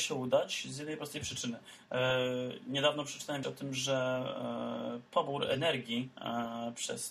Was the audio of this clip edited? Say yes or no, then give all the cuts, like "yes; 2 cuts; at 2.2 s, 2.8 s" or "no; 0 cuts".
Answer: yes; 1 cut; at 3.4 s